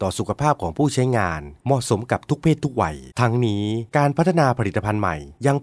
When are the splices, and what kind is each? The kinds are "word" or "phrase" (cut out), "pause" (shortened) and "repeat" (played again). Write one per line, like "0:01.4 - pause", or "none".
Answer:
0:03.1 - pause